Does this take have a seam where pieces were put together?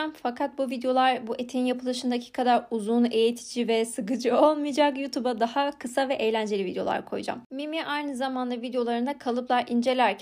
no; 0 cuts

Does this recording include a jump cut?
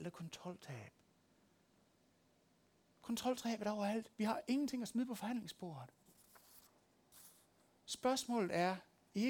no; 0 cuts

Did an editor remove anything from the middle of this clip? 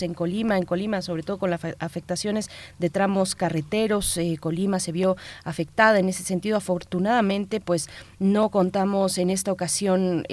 no; 0 cuts

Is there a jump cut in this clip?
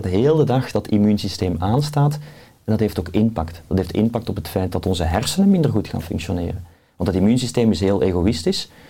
no; 0 cuts

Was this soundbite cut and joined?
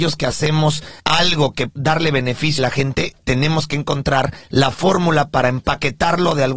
yes; 3 cuts; at 1.0 s, 1.7 s, 2.6 s

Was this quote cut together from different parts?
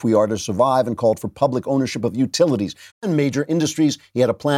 yes; 1 cut; at 2.9 s

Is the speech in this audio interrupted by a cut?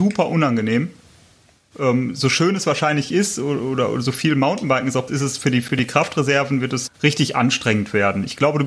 yes; 3 cuts; at 3.1 s, 5.1 s, 6.9 s

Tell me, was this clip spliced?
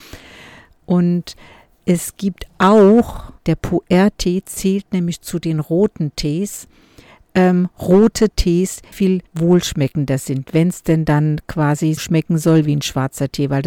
yes; 4 cuts; at 3.4 s, 8.9 s, 9.3 s, 12.0 s

